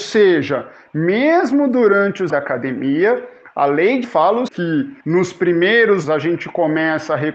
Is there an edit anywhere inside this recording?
yes; 5 cuts; at 2.3 s, 4.0 s, 4.5 s, 5.0 s, 6.0 s

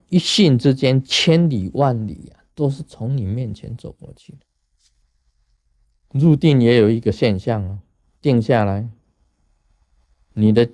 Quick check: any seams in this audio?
no; 0 cuts

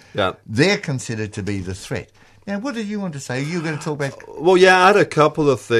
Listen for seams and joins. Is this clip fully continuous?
yes; 0 cuts

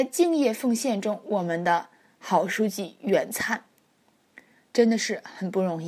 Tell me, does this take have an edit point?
no; 0 cuts

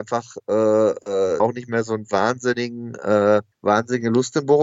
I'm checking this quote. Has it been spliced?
yes; 2 cuts; at 1.4 s, 3.5 s

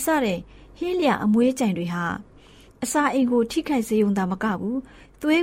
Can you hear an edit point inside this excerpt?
no; 0 cuts

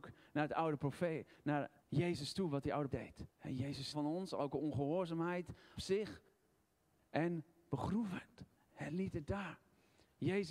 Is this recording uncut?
no; 5 cuts; at 1.8 s, 2.9 s, 3.3 s, 3.9 s, 5.8 s

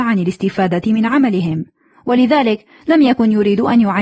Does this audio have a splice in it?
no; 0 cuts

